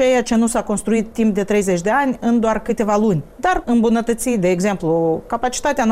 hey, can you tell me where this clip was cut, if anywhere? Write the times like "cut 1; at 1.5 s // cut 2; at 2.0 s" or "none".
cut 1; at 3.6 s